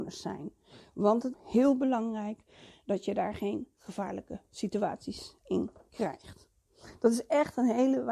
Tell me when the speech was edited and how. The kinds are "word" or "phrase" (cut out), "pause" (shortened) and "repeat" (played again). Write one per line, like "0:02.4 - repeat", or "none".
0:01.3 - word